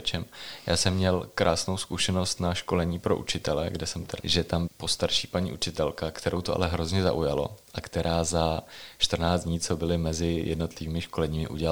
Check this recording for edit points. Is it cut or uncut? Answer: cut